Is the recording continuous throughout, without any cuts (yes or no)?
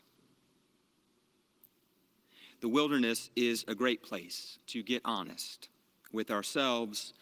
no